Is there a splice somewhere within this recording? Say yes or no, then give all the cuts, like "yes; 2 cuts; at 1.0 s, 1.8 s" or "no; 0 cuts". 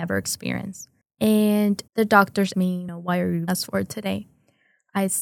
yes; 3 cuts; at 1.9 s, 2.5 s, 3.5 s